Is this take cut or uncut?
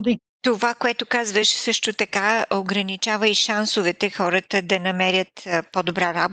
uncut